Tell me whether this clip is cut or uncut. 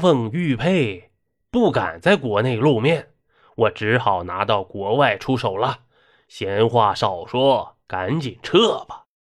cut